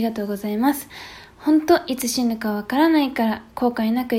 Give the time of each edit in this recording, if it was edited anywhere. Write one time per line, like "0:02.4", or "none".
none

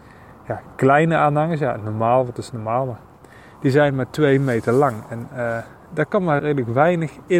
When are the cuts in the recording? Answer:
0:06.4

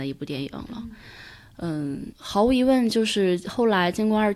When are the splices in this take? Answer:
0:02.1

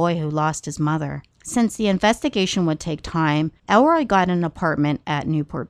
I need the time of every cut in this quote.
0:01.3
0:03.6

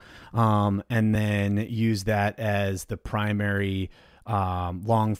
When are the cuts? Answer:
none

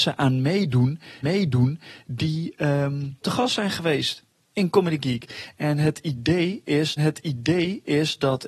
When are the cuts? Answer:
0:01.2
0:03.2
0:07.0

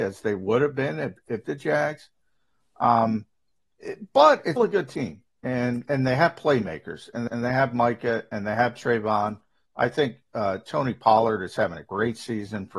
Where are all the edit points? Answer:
0:01.4
0:03.8
0:04.6
0:05.9
0:07.3

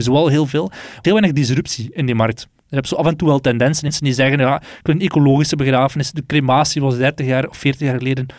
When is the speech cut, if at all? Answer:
0:01.0
0:03.9

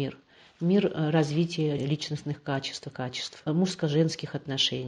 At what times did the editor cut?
0:01.8
0:02.9
0:03.5

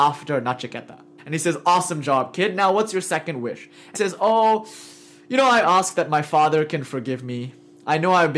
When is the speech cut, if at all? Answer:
0:01.2
0:03.9
0:05.6

